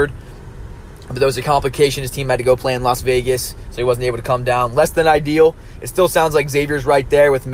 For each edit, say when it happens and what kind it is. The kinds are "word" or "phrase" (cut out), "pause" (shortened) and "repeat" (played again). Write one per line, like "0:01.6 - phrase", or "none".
none